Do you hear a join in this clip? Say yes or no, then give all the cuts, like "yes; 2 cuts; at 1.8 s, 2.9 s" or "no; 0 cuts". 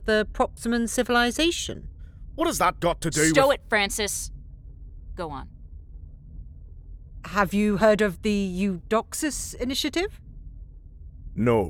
no; 0 cuts